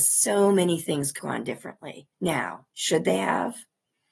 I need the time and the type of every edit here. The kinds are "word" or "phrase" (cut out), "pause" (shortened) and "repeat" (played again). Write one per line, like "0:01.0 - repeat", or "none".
0:01.2 - word
0:02.1 - pause